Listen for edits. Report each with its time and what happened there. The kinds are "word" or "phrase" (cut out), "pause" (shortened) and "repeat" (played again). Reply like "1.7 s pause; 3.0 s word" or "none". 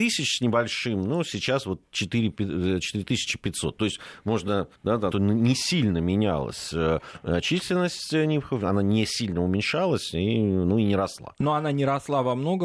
4.8 s pause; 5.1 s phrase